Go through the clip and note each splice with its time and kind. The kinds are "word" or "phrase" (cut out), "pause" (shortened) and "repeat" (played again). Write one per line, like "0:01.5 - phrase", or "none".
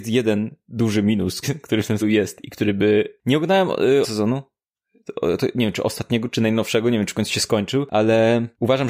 0:01.4 - word
0:02.0 - word
0:04.0 - word

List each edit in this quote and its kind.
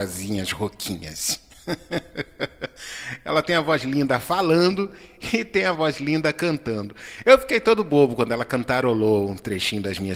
none

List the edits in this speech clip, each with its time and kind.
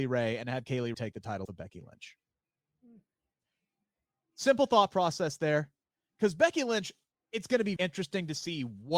0:00.9 - word
0:01.5 - word
0:07.8 - word

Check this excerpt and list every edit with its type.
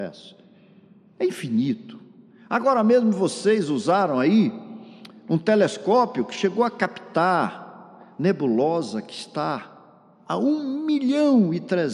none

